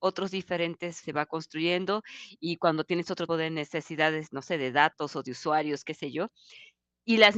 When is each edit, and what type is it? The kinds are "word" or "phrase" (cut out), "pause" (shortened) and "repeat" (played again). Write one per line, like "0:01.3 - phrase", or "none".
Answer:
0:01.0 - phrase
0:03.3 - word